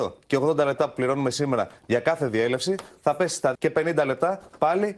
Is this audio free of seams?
no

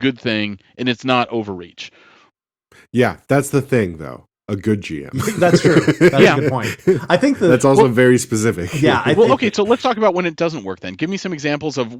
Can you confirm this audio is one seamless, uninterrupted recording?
yes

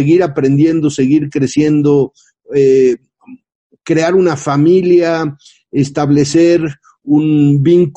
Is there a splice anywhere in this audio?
no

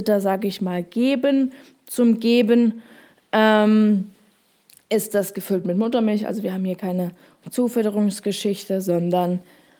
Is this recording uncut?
yes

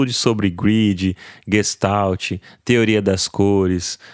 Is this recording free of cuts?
yes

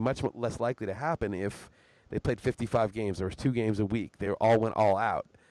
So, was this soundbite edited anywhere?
no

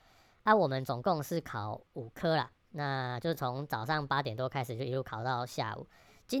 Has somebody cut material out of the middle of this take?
yes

